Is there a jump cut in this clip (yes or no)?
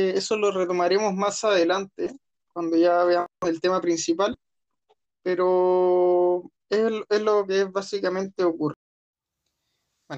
no